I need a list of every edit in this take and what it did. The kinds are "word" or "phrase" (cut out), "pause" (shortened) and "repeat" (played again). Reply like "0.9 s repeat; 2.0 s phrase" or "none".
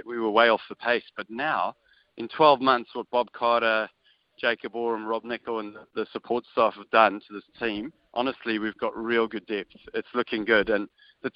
8.0 s pause